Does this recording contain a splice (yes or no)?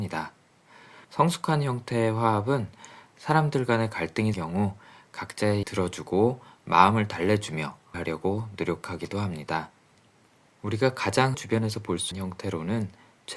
yes